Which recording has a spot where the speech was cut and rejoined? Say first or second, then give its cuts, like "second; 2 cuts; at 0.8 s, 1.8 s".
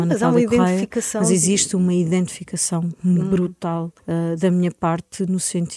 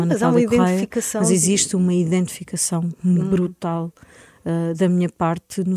first; 1 cut; at 4.0 s